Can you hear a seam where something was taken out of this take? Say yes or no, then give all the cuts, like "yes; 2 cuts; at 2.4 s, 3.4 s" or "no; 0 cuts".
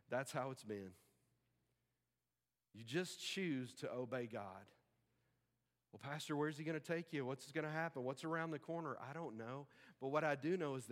no; 0 cuts